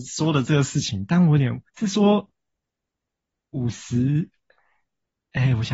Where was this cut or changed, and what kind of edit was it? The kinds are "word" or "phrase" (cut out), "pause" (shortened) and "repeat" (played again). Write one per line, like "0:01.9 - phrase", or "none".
0:01.7 - pause